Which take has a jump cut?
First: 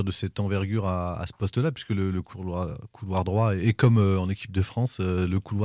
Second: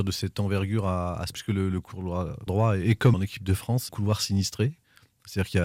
second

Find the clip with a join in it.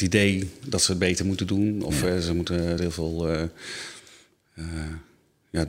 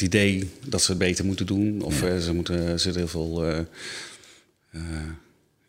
first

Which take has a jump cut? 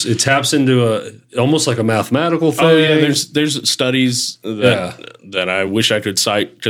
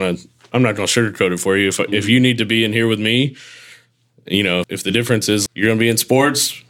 second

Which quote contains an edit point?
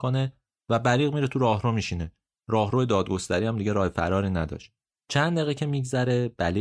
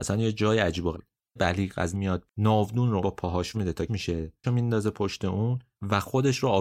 second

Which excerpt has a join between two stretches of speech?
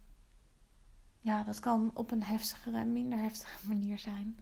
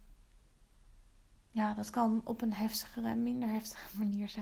first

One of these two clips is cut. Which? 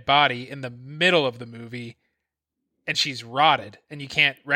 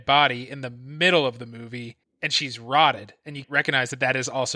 second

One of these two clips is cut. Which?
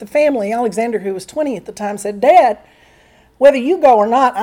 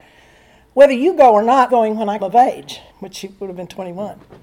second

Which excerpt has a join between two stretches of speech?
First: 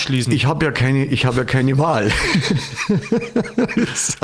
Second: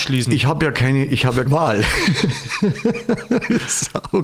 second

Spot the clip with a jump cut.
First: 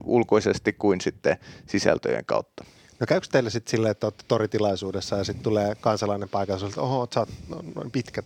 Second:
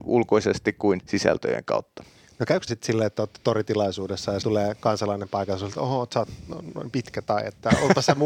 second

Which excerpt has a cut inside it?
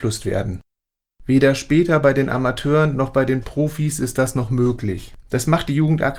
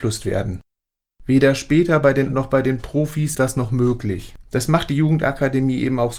second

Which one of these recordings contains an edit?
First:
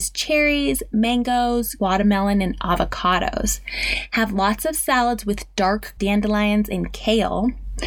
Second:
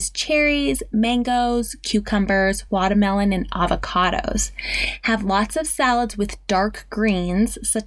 first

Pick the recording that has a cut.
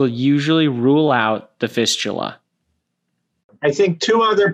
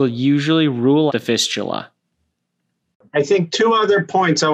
second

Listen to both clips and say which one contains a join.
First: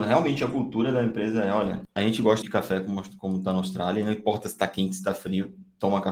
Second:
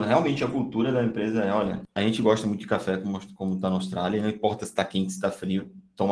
first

